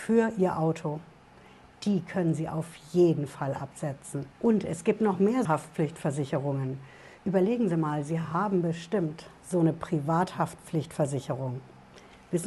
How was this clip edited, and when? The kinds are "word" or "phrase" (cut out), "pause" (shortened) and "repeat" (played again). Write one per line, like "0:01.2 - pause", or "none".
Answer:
0:05.4 - word

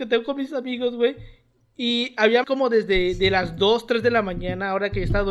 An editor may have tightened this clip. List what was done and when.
0:02.4 - word

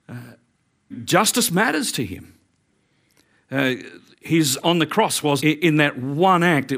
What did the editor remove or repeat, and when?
0:00.9 - word
0:04.6 - phrase
0:05.4 - word

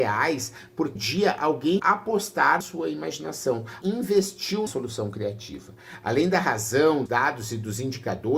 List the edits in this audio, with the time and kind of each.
0:01.0 - word
0:01.8 - word
0:02.6 - word
0:03.8 - word
0:04.7 - word
0:07.1 - word

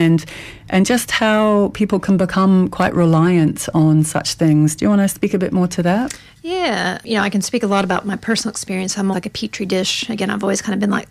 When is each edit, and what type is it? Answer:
0:09.1 - word

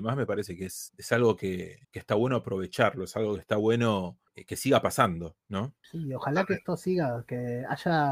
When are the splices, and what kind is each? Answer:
0:01.8 - pause

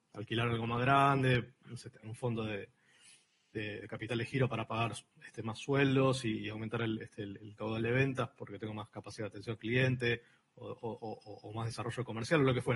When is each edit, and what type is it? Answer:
none

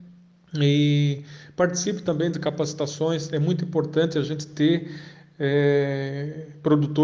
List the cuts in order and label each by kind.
none

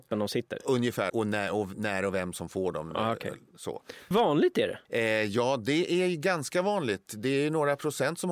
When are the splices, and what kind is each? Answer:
0:01.1 - word
0:04.1 - phrase
0:04.8 - pause

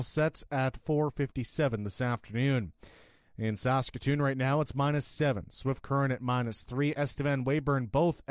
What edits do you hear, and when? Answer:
none

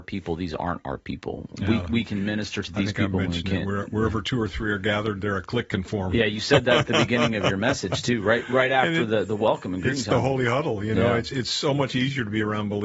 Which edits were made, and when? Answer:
none

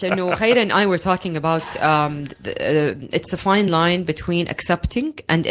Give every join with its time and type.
none

